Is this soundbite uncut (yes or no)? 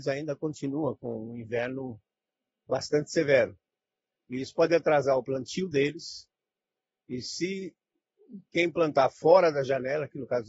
yes